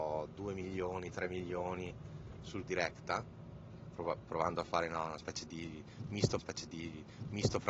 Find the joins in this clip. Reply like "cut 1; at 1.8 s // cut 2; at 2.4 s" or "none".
cut 1; at 2.7 s // cut 2; at 6.4 s